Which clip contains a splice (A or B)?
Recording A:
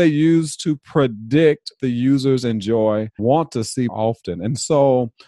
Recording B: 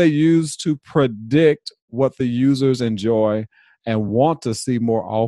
A